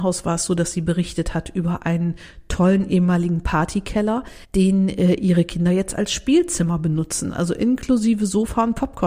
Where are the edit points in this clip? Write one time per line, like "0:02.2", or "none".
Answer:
0:04.4